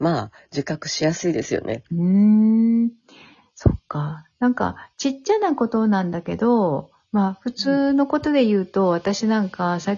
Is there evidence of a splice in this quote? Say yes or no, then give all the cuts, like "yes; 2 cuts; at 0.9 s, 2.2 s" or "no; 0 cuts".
yes; 1 cut; at 1.9 s